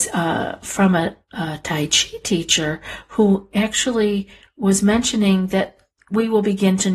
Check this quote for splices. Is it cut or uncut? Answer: uncut